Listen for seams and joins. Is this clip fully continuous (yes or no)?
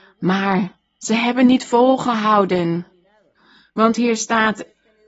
yes